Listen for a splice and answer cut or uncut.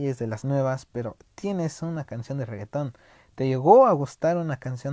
uncut